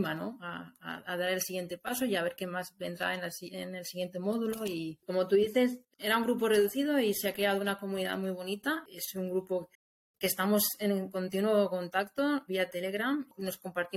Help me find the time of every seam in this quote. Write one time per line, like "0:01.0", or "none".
0:12.5